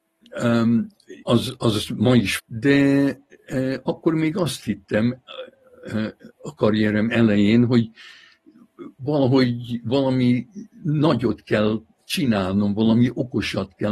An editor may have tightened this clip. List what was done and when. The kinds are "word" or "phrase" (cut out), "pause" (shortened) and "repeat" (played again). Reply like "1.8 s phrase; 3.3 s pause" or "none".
1.2 s word; 2.4 s word; 10.7 s pause

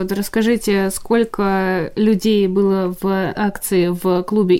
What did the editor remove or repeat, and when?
3.4 s word

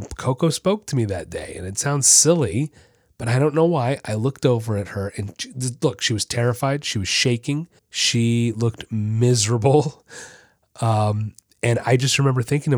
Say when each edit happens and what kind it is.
7.8 s pause

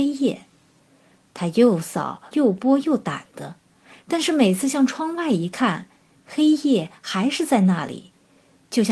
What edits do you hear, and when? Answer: 2.3 s phrase

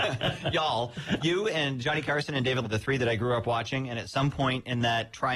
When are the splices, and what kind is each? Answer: 1.2 s word; 2.6 s word

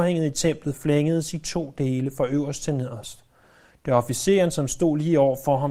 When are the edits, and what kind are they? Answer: none

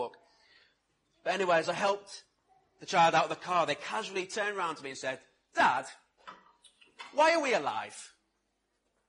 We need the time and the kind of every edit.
none

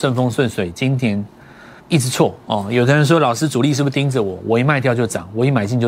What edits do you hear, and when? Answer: 1.8 s pause

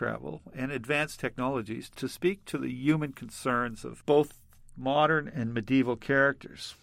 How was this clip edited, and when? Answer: none

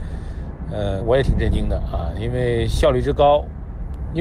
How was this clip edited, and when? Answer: 1.0 s word

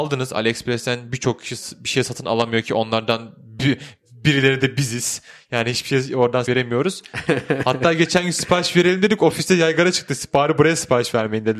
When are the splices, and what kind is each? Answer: 6.5 s word

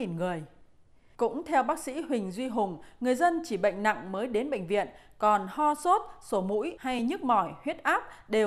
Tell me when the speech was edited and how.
none

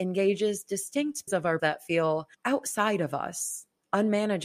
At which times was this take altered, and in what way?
1.3 s word; 1.6 s word; 2.3 s pause

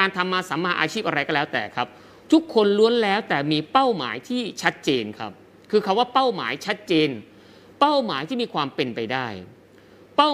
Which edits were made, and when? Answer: none

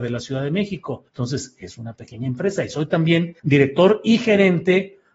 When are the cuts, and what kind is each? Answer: 1.1 s pause; 3.4 s pause

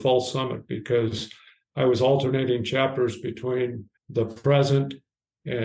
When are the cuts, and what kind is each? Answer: 4.0 s pause

